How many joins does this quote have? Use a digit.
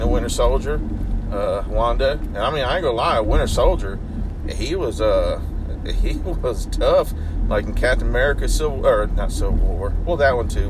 1